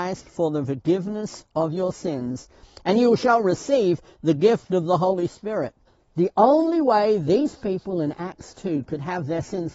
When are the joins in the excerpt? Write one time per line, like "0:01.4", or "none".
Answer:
0:05.9